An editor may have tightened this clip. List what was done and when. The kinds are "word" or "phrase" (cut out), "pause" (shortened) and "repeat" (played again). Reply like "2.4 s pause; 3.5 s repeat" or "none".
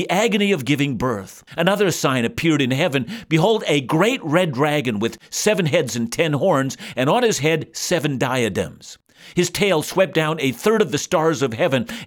1.5 s pause

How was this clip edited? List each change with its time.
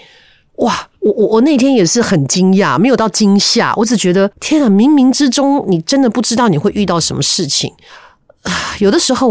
1.0 s pause; 4.3 s pause

